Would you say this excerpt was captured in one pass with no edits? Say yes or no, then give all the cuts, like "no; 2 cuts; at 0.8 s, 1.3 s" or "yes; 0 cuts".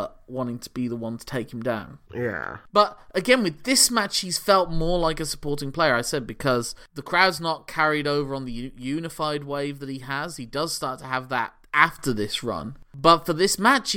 no; 1 cut; at 2.0 s